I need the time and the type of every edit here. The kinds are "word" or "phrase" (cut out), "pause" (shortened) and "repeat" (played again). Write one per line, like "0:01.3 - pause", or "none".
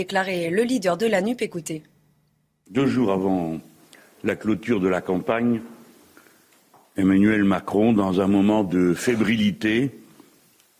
none